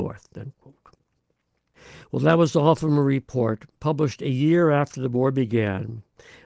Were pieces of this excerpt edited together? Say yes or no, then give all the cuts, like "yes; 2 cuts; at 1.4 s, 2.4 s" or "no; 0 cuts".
yes; 1 cut; at 3.7 s